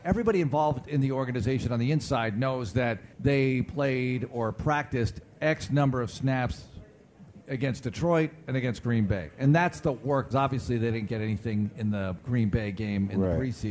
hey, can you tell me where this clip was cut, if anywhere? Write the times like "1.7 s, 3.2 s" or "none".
3.1 s, 10.3 s